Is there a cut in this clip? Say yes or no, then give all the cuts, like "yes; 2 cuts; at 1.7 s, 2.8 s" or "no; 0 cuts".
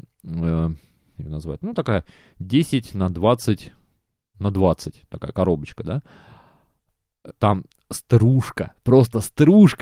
yes; 3 cuts; at 1.2 s, 1.6 s, 7.3 s